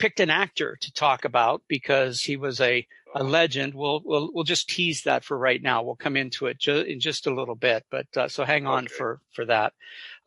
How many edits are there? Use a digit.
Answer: 1